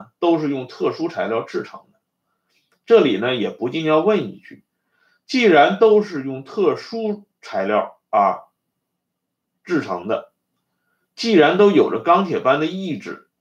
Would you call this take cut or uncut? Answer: uncut